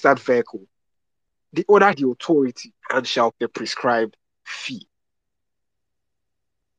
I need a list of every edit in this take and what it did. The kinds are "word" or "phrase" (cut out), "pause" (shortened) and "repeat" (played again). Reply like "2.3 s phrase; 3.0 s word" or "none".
1.9 s phrase; 2.8 s pause; 3.3 s word